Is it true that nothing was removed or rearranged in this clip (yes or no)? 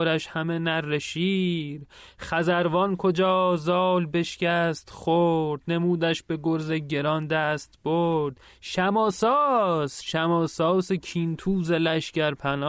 yes